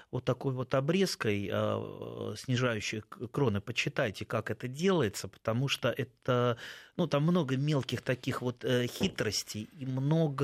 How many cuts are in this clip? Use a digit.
0